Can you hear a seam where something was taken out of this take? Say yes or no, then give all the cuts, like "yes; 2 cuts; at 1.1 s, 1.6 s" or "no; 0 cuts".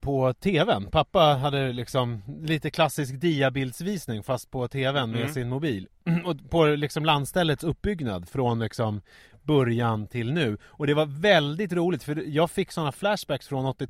no; 0 cuts